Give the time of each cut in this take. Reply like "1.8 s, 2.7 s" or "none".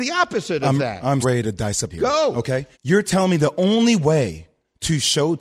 1.2 s, 1.9 s, 2.7 s